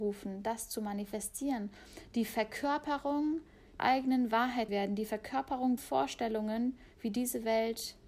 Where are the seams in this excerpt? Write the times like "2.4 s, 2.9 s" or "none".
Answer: 3.8 s, 4.7 s, 5.8 s